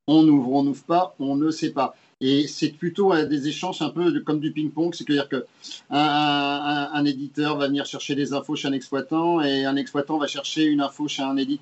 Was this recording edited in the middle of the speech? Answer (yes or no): no